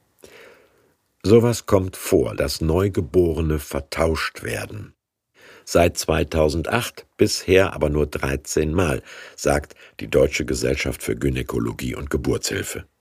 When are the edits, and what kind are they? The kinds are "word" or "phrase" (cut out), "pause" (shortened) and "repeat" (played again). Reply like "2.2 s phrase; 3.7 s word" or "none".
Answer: 2.3 s word